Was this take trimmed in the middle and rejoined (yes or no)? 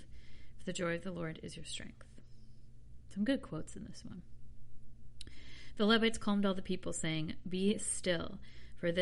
no